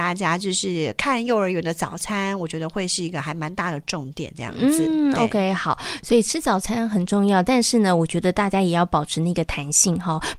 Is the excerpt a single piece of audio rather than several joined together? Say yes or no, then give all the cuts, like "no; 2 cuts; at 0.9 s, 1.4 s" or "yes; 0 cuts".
yes; 0 cuts